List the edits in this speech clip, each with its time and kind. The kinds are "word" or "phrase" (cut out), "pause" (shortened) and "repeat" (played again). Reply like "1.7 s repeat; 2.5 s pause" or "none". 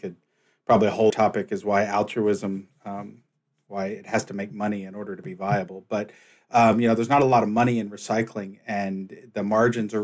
1.1 s word